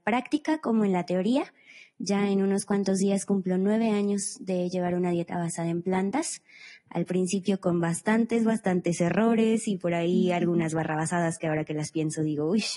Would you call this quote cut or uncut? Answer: uncut